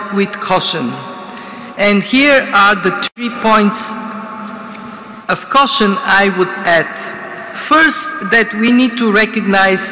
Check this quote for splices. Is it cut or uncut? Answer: uncut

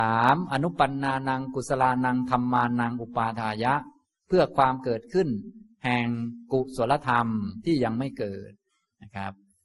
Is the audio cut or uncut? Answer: uncut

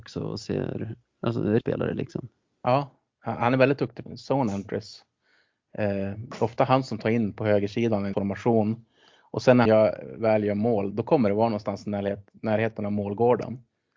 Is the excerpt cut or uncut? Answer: cut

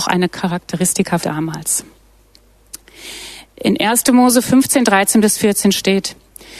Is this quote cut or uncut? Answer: cut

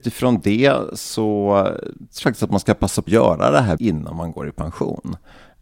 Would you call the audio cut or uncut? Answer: cut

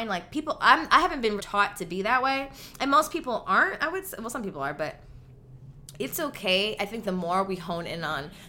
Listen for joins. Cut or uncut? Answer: cut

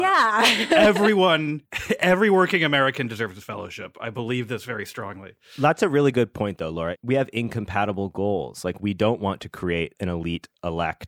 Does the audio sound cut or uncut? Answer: uncut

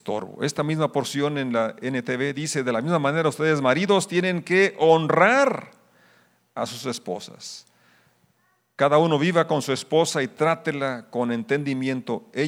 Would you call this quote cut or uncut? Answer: uncut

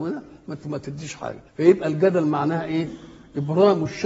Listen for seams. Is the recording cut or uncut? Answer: cut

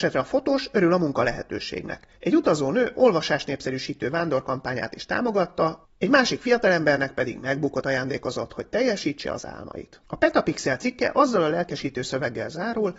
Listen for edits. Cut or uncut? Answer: cut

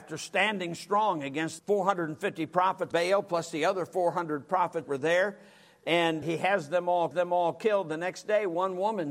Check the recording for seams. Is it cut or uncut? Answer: cut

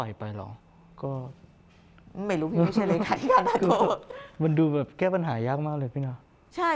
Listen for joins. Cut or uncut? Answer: uncut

